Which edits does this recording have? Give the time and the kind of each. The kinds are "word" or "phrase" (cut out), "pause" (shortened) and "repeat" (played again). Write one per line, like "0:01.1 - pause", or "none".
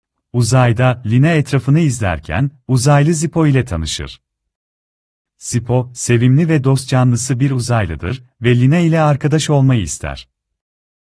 none